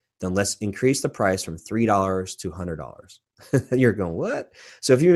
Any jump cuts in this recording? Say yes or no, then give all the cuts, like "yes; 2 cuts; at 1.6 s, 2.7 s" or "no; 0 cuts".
yes; 1 cut; at 3.2 s